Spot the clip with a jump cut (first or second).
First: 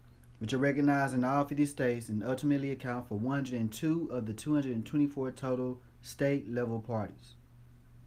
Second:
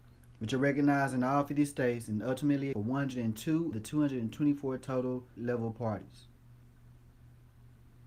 second